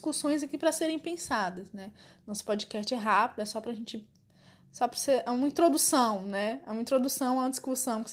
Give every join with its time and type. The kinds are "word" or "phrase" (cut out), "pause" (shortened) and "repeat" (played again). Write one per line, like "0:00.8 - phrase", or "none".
none

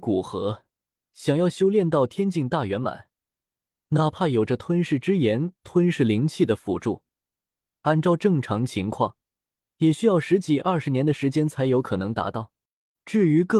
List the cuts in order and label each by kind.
none

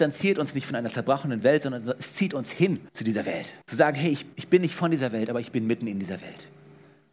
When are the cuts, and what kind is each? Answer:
0:02.9 - pause
0:03.6 - pause
0:04.3 - pause

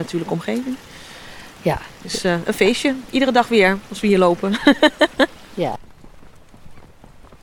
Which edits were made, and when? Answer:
none

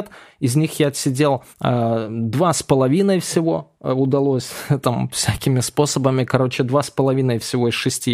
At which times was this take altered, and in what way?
0:01.5 - pause
0:03.7 - pause

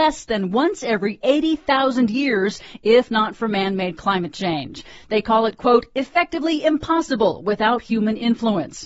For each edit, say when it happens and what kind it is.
none

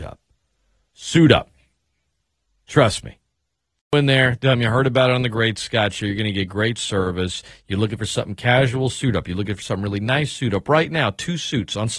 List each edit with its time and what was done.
none

